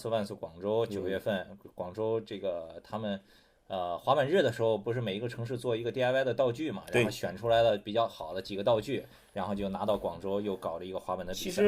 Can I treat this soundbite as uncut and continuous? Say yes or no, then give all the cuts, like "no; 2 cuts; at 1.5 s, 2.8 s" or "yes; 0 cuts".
yes; 0 cuts